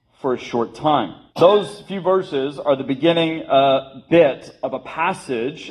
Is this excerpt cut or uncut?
cut